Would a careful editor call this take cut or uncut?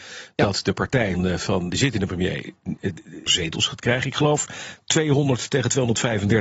cut